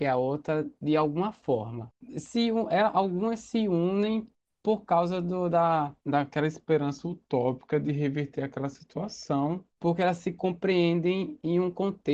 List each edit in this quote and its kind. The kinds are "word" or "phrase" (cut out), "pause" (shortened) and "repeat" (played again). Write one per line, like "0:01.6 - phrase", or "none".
none